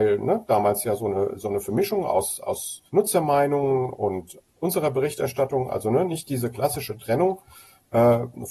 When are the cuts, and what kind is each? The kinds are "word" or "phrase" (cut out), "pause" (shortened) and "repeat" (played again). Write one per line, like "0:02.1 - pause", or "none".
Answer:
0:02.9 - pause